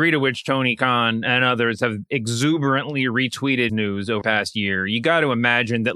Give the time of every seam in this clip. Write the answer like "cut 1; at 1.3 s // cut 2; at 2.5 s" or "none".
cut 1; at 3.7 s // cut 2; at 4.2 s